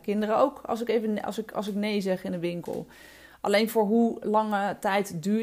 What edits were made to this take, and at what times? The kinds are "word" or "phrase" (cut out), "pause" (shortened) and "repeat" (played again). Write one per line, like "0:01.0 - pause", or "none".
none